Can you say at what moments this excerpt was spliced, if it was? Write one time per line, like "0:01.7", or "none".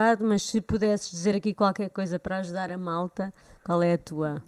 none